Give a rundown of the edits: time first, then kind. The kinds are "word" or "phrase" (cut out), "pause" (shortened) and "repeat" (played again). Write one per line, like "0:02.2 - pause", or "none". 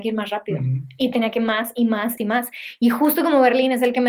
0:02.2 - phrase